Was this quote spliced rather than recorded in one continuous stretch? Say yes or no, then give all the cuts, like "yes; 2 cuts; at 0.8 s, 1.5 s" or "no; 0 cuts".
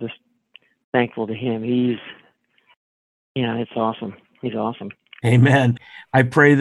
no; 0 cuts